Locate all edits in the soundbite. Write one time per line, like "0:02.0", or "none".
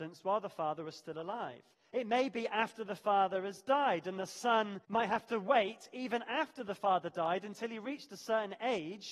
0:01.7
0:04.8